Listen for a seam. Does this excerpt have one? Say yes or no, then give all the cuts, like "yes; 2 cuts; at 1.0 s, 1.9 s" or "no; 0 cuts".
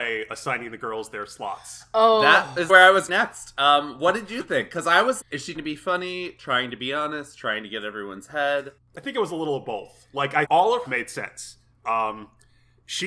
yes; 6 cuts; at 2.7 s, 3.1 s, 5.2 s, 5.5 s, 10.4 s, 10.9 s